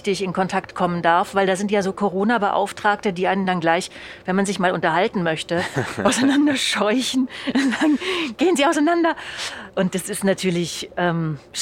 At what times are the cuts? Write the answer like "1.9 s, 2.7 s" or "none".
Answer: none

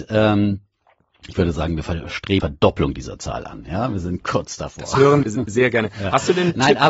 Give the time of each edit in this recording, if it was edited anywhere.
2.4 s, 5.2 s

